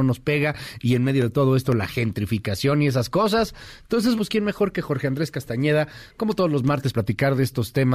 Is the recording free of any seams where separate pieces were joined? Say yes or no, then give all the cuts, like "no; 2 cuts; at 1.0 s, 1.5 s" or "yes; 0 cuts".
no; 2 cuts; at 4.2 s, 6.9 s